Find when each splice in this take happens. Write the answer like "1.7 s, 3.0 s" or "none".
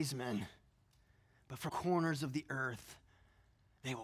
1.7 s